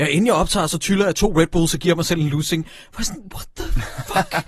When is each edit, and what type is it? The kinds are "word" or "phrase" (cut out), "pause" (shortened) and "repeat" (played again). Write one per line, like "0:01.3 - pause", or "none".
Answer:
none